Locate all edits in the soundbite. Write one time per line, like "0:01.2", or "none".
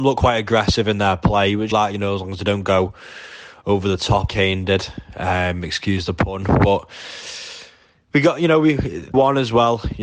0:01.7
0:04.3
0:09.1